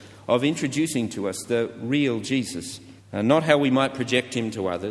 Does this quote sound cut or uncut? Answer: cut